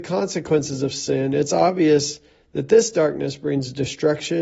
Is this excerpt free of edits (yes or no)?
yes